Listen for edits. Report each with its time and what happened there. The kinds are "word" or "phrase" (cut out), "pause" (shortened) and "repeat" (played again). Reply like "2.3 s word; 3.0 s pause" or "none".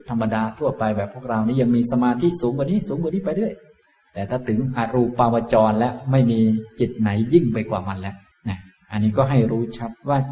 8.3 s pause